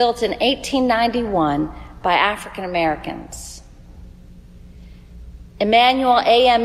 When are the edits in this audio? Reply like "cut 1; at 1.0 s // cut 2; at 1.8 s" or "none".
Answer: none